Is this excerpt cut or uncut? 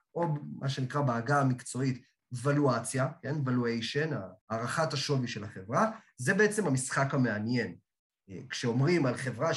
cut